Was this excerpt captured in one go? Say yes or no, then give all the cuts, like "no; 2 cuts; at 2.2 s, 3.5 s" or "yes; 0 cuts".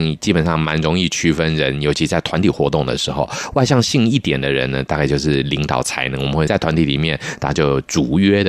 no; 1 cut; at 6.5 s